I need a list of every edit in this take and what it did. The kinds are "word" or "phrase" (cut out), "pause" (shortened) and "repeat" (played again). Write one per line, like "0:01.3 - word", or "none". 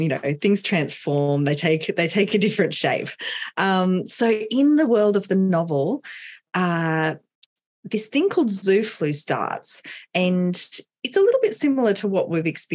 none